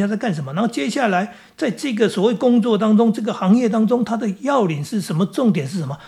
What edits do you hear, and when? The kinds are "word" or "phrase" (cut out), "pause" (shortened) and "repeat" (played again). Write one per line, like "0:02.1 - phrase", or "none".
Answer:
none